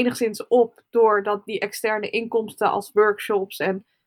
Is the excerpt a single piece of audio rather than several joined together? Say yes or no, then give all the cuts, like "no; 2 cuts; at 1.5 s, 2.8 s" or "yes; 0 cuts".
yes; 0 cuts